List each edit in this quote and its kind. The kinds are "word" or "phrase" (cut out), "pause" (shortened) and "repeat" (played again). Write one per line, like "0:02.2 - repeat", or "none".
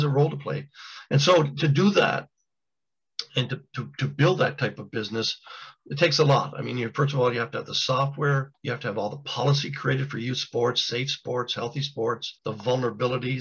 0:08.5 - pause
0:12.4 - pause